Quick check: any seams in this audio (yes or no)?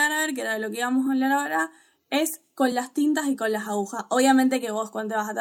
no